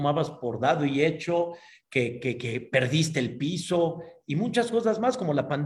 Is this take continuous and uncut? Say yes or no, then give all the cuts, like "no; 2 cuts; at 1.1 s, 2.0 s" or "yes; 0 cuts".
yes; 0 cuts